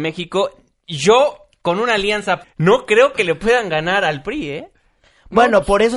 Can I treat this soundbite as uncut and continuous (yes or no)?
no